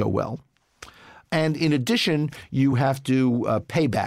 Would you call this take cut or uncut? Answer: uncut